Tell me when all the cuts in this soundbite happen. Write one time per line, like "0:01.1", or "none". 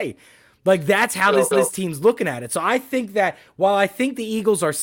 0:01.5